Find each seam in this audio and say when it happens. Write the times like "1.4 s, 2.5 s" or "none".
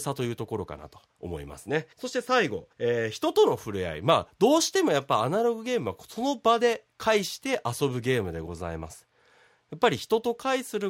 1.1 s, 1.9 s, 2.7 s